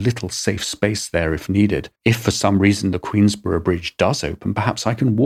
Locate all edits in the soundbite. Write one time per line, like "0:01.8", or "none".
0:02.0